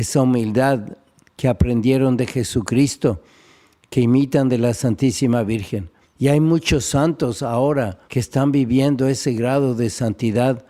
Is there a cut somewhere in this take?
yes; 2 cuts; at 6.0 s, 8.1 s

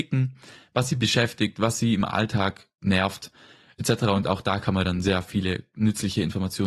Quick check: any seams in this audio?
no; 0 cuts

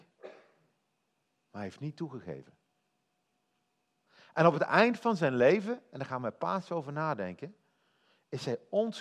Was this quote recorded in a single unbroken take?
yes; 0 cuts

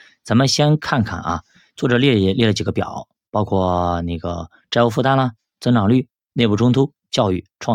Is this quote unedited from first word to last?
yes; 0 cuts

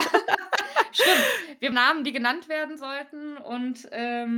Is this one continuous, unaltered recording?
no; 1 cut; at 1.7 s

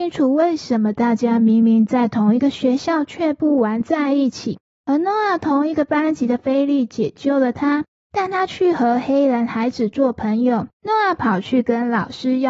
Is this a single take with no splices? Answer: no; 1 cut; at 10.7 s

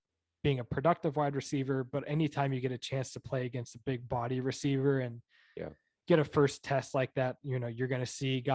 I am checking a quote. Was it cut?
no; 0 cuts

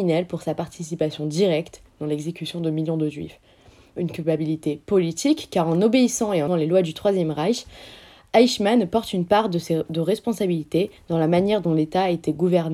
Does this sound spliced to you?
yes; 1 cut; at 6.5 s

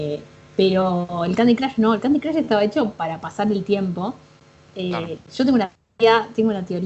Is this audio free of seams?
yes; 0 cuts

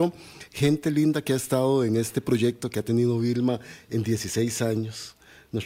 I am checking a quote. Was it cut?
no; 0 cuts

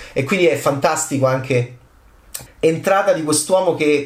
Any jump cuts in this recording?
yes; 1 cut; at 2.5 s

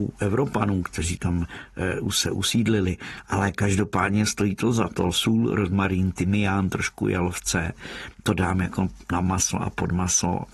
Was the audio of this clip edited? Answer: no; 0 cuts

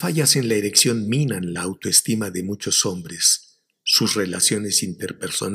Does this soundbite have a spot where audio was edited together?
no; 0 cuts

